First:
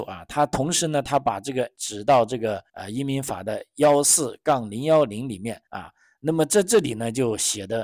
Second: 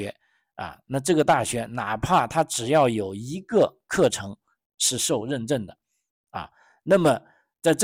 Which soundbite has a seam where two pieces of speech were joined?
first; 3 cuts; at 1.7 s, 2.7 s, 5.7 s

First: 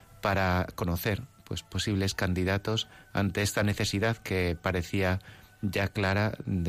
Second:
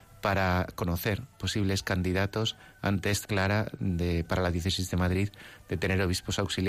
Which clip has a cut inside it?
second; 2 cuts; at 1.3 s, 3.2 s

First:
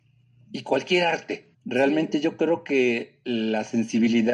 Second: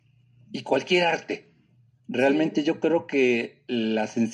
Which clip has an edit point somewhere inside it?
first; 1 cut; at 1.5 s

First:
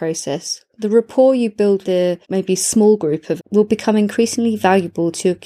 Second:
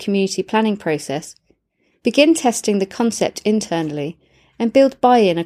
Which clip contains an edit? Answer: first; 3 cuts; at 1.8 s, 2.2 s, 3.4 s

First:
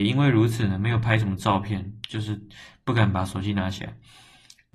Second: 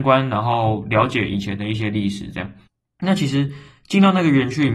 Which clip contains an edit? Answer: second; 1 cut; at 2.7 s

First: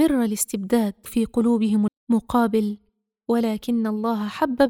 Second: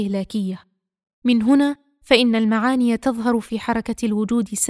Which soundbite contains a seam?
first; 2 cuts; at 1.1 s, 1.9 s

